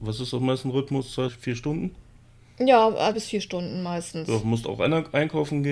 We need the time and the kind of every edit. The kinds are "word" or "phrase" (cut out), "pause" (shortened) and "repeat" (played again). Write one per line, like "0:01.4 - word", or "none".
0:01.3 - word
0:03.1 - word